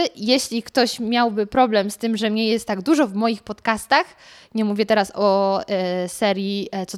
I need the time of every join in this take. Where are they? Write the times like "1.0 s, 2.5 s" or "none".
none